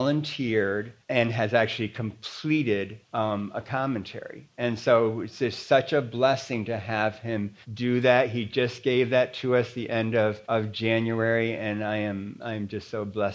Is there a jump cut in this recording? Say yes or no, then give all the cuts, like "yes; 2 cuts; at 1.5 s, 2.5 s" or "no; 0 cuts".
yes; 4 cuts; at 1.0 s, 3.0 s, 7.6 s, 10.4 s